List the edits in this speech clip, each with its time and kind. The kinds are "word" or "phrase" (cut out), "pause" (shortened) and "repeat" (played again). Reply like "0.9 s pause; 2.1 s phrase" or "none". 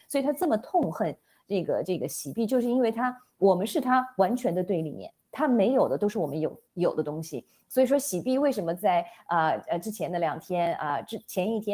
6.7 s pause